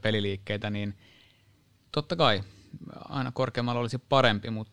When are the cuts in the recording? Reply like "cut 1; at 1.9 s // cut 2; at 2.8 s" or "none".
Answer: cut 1; at 3.1 s